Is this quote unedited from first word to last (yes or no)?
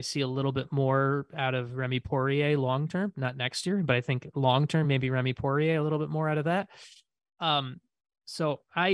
yes